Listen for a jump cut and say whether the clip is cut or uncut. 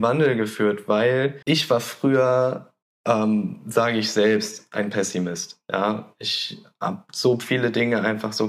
cut